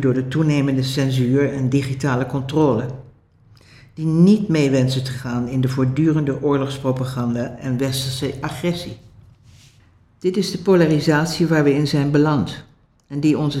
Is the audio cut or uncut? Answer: uncut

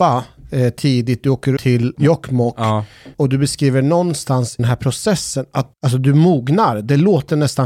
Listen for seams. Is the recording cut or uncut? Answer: cut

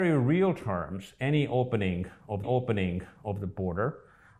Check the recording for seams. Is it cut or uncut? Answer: cut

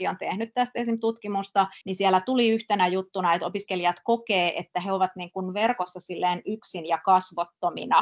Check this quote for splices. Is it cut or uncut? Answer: cut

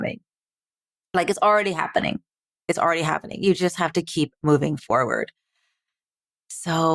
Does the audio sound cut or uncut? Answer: uncut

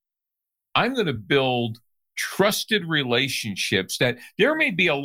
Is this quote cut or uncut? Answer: uncut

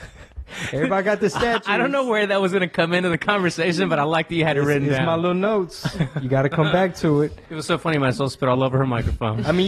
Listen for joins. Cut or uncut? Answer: uncut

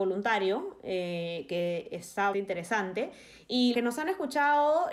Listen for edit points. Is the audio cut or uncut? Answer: cut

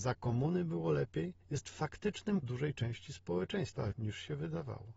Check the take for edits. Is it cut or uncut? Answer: cut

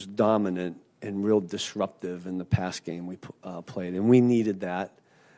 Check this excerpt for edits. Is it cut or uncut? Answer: uncut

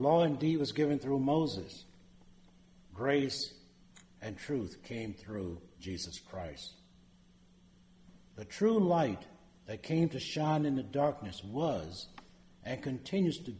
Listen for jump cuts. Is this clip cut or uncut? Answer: uncut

